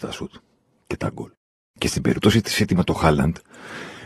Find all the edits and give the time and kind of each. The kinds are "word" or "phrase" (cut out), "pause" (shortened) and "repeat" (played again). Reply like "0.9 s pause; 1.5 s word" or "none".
none